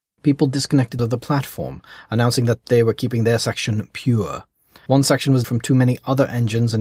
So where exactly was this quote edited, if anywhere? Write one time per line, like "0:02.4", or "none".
0:01.0
0:05.4